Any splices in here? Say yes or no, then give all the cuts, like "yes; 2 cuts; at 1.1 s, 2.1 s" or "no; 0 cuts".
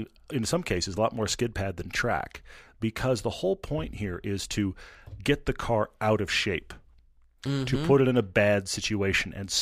no; 0 cuts